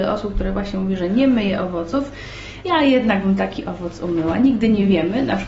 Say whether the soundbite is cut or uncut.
uncut